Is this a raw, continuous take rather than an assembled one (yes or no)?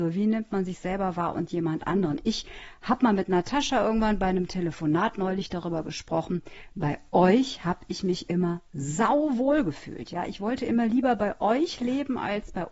yes